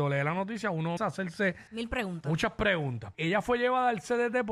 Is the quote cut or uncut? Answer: cut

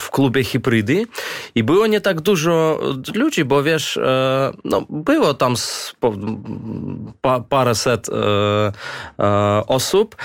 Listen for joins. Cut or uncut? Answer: uncut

